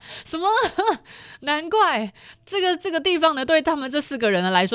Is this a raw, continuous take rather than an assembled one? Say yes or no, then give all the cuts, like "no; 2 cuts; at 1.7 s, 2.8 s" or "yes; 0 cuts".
yes; 0 cuts